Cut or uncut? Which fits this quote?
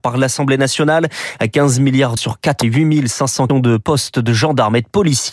cut